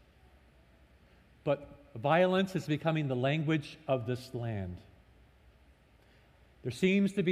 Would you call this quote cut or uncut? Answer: uncut